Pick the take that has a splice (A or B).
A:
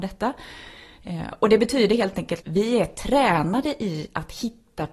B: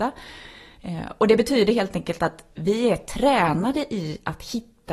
A